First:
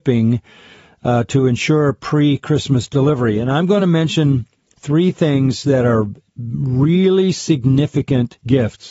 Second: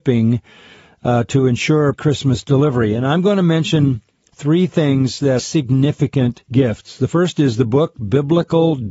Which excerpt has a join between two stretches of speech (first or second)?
second